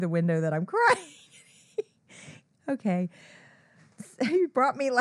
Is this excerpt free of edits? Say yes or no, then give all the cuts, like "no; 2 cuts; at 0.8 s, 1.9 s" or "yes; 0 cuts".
yes; 0 cuts